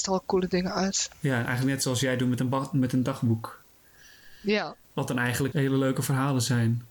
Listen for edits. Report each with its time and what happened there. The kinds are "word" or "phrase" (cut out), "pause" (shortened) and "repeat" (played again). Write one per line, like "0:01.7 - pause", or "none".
0:01.1 - pause
0:04.8 - pause
0:05.5 - word